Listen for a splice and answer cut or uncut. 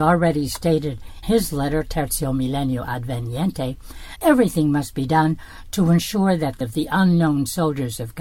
cut